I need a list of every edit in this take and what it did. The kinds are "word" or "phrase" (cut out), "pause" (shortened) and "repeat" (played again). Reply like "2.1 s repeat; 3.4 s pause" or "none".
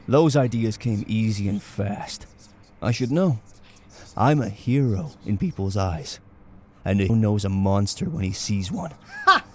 7.1 s word